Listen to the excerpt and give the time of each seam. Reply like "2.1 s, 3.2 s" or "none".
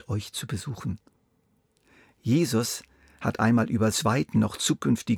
3.9 s